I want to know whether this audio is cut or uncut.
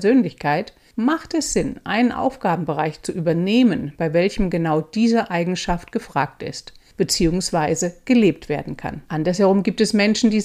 cut